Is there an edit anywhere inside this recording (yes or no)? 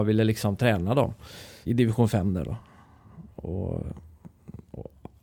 yes